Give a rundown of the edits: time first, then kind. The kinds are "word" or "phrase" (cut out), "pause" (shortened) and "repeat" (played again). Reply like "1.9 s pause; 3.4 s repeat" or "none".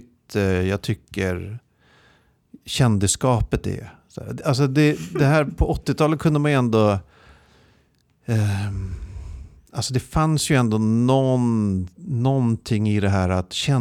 none